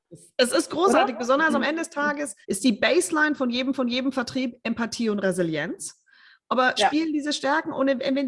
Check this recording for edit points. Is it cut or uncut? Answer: cut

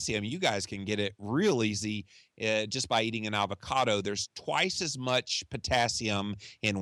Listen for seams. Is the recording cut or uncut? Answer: uncut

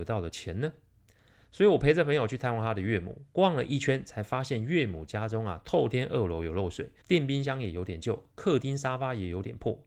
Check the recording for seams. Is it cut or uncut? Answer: cut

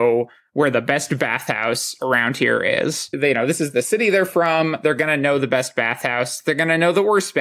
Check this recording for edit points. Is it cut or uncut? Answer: uncut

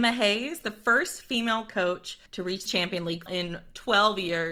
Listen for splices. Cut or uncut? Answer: cut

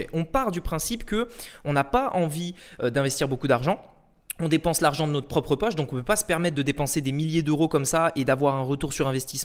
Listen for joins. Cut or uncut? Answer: uncut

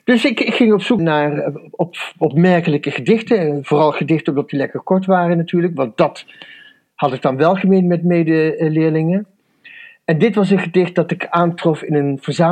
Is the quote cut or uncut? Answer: cut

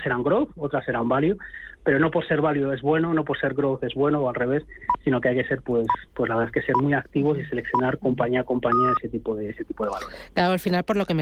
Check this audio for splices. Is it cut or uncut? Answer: cut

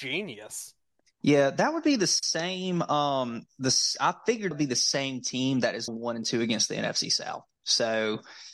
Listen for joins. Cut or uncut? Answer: cut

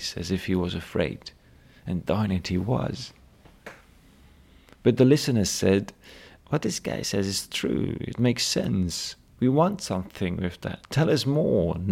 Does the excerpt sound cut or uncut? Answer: uncut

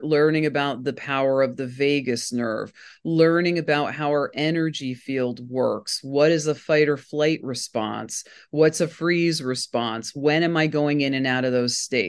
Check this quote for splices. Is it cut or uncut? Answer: uncut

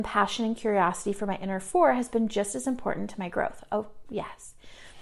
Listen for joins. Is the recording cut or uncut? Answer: uncut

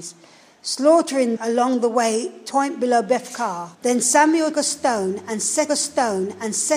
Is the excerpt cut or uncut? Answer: cut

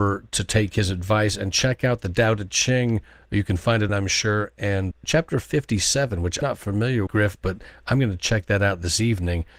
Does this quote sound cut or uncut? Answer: cut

